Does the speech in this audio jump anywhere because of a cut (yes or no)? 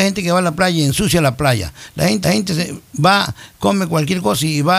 yes